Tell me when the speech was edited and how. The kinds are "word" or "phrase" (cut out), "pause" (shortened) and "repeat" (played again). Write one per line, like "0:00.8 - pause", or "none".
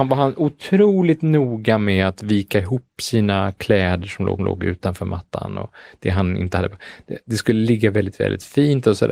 0:04.4 - repeat

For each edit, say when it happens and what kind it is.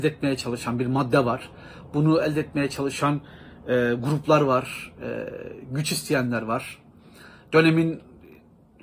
none

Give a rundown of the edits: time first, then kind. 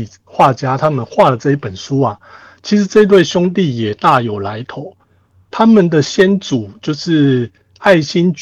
none

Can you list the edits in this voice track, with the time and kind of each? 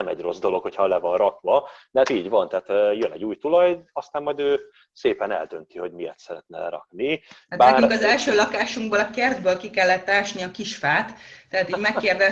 none

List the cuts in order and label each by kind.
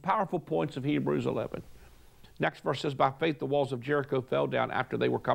none

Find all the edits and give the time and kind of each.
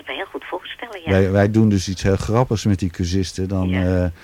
none

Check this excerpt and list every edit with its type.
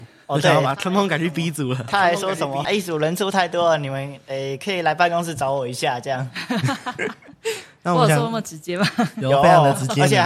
none

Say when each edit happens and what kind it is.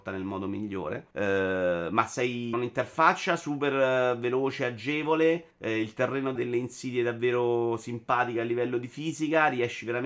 0:01.1 - pause
0:02.5 - word
0:05.5 - pause
0:06.4 - phrase

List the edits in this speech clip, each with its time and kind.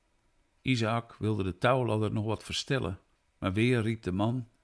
0:03.2 - pause

